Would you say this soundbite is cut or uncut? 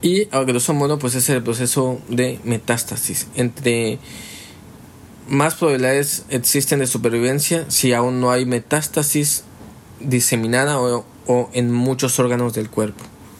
uncut